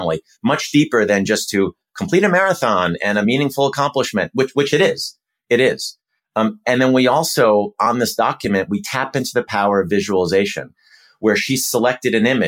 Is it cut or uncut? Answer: uncut